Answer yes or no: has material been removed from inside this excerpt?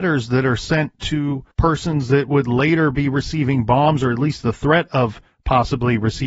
yes